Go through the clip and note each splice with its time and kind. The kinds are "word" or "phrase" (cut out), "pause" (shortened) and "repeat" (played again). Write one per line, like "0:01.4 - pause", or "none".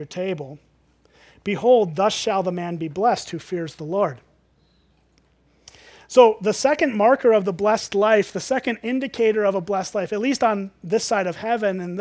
none